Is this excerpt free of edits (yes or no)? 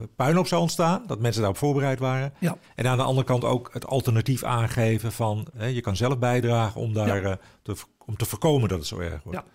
yes